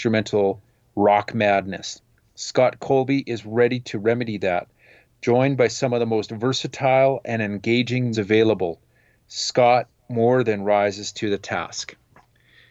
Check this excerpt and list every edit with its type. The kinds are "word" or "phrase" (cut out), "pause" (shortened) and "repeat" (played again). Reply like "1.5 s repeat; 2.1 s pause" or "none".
8.1 s word